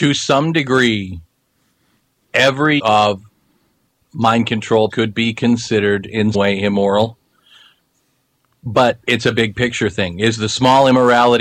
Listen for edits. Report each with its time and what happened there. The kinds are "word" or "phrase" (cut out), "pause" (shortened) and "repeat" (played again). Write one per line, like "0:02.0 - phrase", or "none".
0:02.8 - word
0:04.9 - word
0:06.3 - word